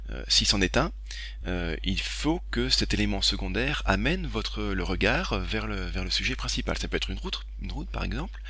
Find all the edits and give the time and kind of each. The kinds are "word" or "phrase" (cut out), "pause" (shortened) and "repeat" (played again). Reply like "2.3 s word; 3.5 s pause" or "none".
none